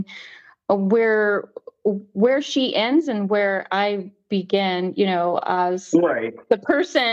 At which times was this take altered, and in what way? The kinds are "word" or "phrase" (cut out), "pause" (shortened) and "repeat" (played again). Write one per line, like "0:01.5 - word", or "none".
none